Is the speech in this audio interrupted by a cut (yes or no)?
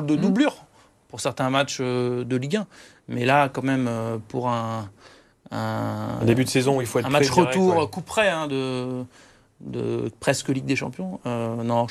no